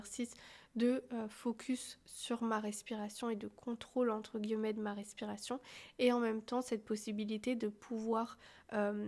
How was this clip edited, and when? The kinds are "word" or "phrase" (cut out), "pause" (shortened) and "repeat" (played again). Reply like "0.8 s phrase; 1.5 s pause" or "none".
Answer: none